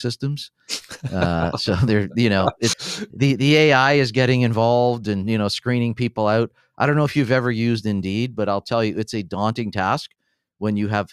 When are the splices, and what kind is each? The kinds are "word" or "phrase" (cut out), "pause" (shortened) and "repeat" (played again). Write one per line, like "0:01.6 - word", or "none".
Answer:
0:02.7 - word

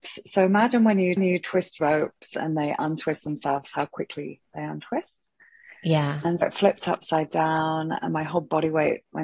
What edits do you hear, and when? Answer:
0:01.2 - repeat
0:06.4 - word

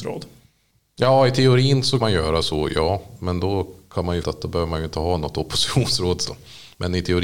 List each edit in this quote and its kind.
0:02.0 - word
0:04.2 - word
0:06.3 - word

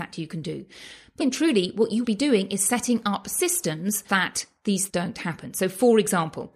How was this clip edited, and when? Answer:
0:01.2 - word
0:02.0 - word
0:04.1 - word
0:04.9 - word

